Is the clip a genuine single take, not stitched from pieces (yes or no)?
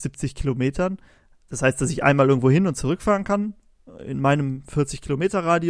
yes